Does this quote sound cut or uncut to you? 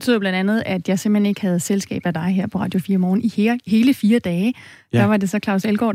uncut